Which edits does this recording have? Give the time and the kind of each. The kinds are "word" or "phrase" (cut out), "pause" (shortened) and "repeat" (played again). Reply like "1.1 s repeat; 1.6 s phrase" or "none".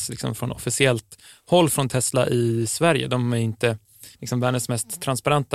4.1 s pause